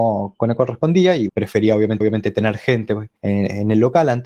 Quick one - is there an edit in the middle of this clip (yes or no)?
yes